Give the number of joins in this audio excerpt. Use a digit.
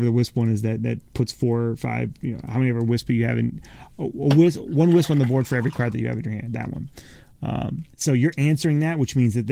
1